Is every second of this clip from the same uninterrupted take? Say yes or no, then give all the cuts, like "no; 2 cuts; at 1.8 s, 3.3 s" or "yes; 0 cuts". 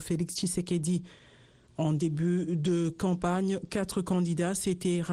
yes; 0 cuts